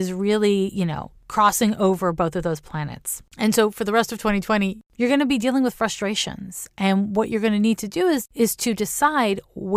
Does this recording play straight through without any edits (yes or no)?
no